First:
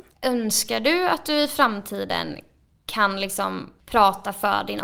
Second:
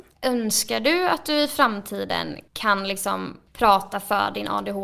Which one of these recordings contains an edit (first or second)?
second